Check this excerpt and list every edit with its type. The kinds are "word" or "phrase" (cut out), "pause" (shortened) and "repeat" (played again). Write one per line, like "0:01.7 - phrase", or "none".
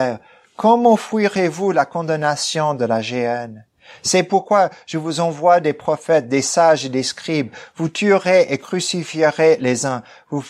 none